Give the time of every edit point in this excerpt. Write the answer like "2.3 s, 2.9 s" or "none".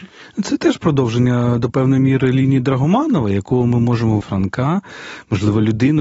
4.2 s